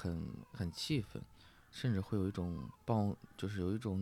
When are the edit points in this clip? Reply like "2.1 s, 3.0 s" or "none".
2.7 s